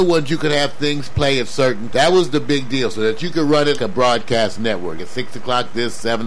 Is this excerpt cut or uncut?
cut